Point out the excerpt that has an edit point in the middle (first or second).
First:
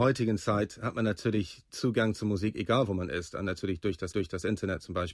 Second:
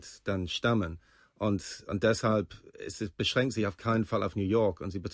first